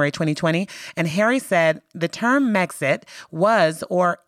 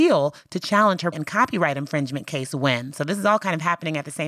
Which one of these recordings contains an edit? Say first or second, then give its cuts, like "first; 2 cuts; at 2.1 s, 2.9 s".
second; 1 cut; at 1.1 s